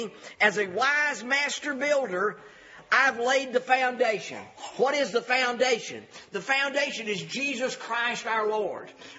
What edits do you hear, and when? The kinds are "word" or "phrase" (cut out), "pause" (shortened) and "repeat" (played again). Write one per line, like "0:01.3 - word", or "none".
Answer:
none

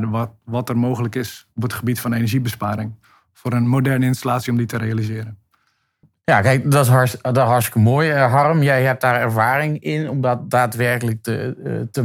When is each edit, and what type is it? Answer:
0:01.5 - pause

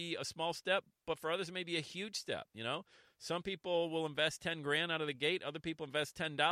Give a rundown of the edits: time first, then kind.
none

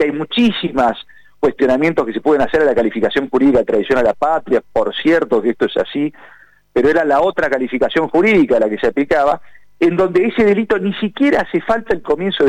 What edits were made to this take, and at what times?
none

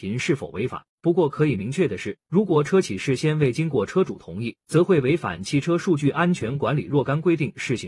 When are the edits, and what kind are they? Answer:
0:00.9 - pause
0:02.2 - pause
0:04.6 - pause

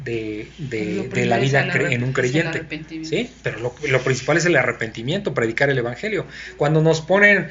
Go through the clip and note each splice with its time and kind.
none

